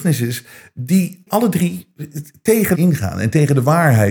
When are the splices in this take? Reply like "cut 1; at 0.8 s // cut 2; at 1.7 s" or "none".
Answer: cut 1; at 1.3 s // cut 2; at 2.7 s